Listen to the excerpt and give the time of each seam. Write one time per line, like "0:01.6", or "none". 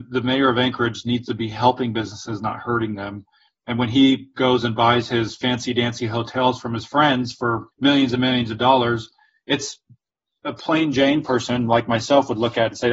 0:07.7